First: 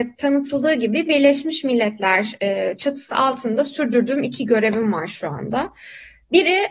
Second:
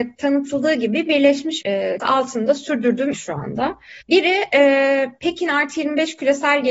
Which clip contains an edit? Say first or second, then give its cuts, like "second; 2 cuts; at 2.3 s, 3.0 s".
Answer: second; 4 cuts; at 1.6 s, 2.0 s, 3.1 s, 4.0 s